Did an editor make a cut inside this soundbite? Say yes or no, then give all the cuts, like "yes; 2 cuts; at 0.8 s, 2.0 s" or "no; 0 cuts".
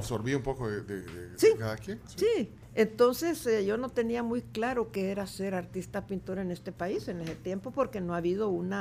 no; 0 cuts